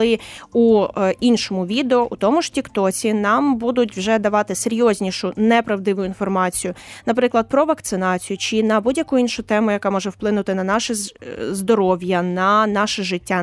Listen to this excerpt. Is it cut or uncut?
uncut